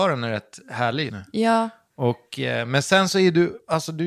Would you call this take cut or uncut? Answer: cut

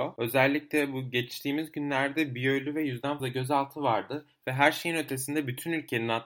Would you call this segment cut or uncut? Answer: cut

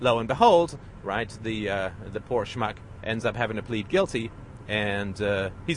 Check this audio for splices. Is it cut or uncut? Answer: uncut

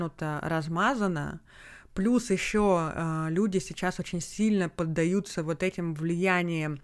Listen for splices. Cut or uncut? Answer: uncut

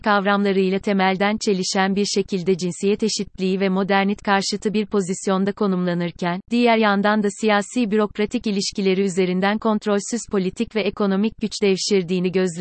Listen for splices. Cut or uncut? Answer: uncut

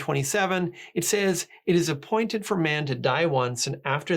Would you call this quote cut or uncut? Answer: uncut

